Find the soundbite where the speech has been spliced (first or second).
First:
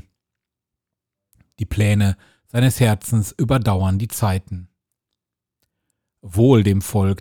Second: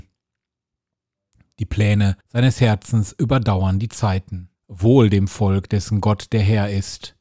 second